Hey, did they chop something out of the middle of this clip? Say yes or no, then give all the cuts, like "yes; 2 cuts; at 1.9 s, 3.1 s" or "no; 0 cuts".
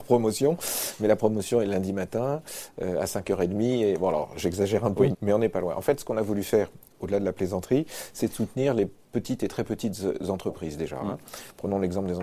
yes; 1 cut; at 5.1 s